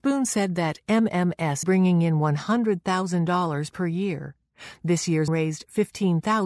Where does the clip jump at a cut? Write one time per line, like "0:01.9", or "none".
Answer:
0:01.6
0:05.3

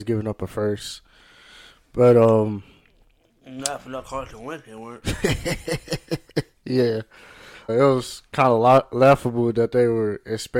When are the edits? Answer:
0:07.7

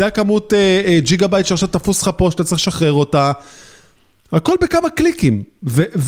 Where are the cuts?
none

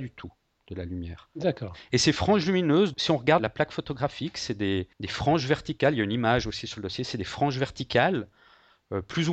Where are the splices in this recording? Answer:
0:02.9
0:03.4
0:04.9

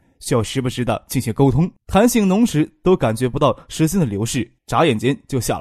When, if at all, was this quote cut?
0:01.8
0:04.6

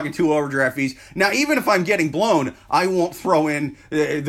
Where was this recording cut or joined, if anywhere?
none

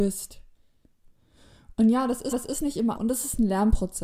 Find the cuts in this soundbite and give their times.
0:02.3
0:03.0

